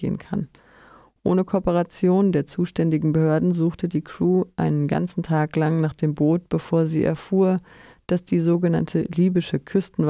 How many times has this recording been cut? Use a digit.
0